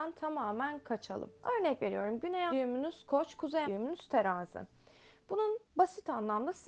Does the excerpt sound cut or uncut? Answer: cut